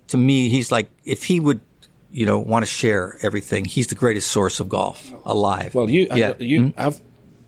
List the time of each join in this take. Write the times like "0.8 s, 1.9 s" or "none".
none